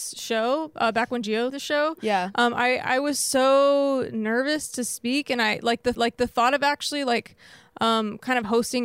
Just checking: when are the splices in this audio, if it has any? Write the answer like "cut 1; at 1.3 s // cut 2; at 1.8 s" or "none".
cut 1; at 1.5 s // cut 2; at 5.9 s